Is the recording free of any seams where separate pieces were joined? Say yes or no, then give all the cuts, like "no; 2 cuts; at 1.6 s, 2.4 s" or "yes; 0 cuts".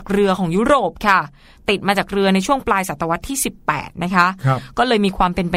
yes; 0 cuts